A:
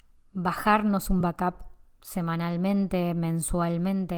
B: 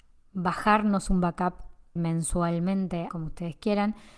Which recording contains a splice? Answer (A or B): B